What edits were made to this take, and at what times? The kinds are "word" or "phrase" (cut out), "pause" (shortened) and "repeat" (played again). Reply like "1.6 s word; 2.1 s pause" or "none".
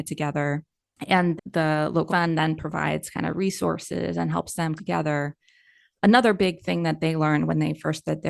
1.4 s word; 2.1 s word; 4.8 s word

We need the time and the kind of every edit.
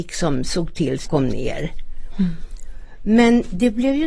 1.0 s word

